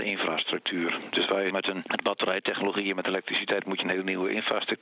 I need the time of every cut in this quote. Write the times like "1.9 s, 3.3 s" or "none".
1.5 s